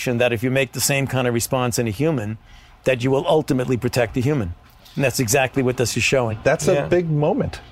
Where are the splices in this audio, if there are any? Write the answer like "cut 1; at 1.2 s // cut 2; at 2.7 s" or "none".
none